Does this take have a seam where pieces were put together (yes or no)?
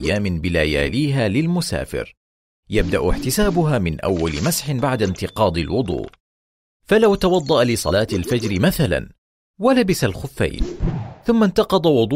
no